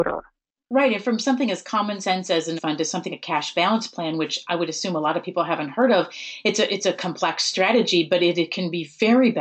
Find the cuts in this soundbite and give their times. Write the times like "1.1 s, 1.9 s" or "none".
2.6 s, 3.1 s